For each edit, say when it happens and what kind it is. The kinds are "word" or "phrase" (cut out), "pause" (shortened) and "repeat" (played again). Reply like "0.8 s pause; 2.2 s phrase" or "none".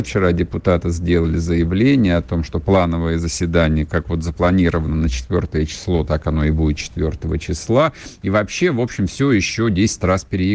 none